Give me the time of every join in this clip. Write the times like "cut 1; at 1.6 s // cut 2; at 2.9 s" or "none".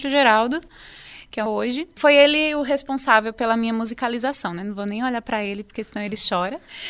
cut 1; at 1.5 s